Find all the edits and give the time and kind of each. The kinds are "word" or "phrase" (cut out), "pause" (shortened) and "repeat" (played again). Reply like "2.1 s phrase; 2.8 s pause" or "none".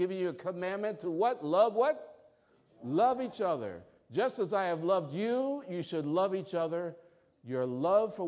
none